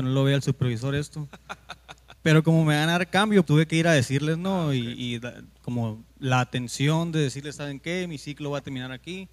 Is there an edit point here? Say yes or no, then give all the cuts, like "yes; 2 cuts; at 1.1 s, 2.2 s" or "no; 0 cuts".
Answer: yes; 2 cuts; at 2.2 s, 3.4 s